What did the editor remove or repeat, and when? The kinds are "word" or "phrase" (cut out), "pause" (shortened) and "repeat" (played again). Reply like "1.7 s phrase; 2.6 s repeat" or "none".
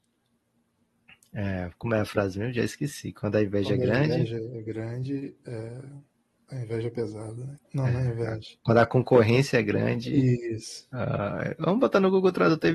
7.6 s pause